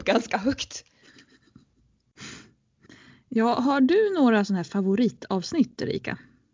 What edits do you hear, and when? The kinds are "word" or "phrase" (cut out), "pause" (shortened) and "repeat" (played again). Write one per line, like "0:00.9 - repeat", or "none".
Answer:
0:02.9 - pause